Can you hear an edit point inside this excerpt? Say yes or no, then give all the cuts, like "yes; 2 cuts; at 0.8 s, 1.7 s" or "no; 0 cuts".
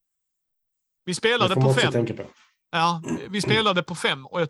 no; 0 cuts